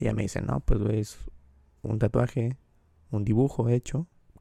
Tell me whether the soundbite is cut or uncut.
uncut